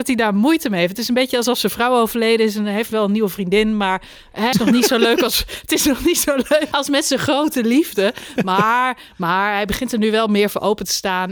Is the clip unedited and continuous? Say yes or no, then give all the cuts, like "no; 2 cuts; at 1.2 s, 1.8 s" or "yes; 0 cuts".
no; 2 cuts; at 4.5 s, 6.7 s